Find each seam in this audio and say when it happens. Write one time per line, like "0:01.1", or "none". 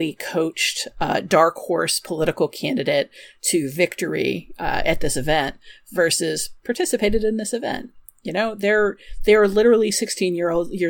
none